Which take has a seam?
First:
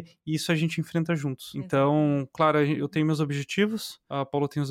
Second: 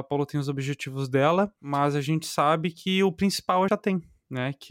second; 1 cut; at 3.7 s

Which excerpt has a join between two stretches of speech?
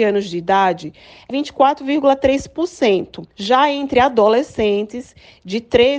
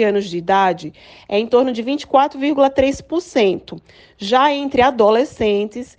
first; 2 cuts; at 1.3 s, 3.3 s

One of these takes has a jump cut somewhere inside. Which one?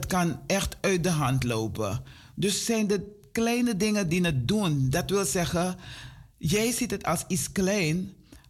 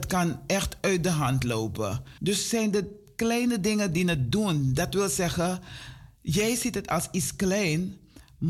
second; 1 cut; at 2.2 s

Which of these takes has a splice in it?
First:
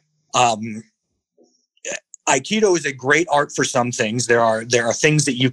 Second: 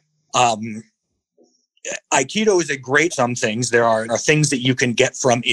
second; 3 cuts; at 2.0 s, 3.1 s, 4.1 s

